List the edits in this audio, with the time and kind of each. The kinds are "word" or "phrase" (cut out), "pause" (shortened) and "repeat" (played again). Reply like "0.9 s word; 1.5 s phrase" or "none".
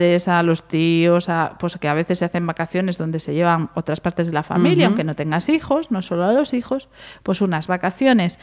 none